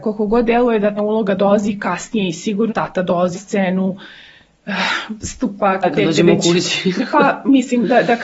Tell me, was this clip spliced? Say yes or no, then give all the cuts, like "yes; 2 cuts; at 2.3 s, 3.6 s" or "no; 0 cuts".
yes; 4 cuts; at 1.0 s, 2.7 s, 3.3 s, 5.8 s